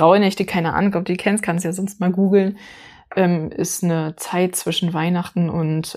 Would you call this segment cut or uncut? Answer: uncut